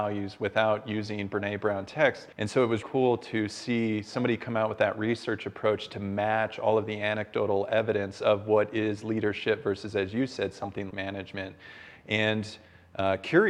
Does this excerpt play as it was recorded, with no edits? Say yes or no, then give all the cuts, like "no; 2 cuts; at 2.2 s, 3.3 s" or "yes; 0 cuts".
no; 3 cuts; at 2.3 s, 2.8 s, 10.9 s